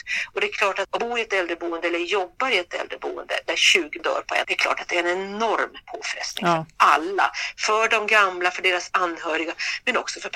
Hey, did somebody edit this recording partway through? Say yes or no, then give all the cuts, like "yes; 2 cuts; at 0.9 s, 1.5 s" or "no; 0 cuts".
yes; 3 cuts; at 1.0 s, 4.0 s, 4.4 s